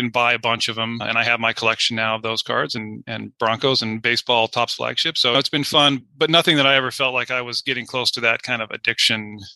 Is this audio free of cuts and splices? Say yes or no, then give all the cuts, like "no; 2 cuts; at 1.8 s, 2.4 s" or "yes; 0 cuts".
yes; 0 cuts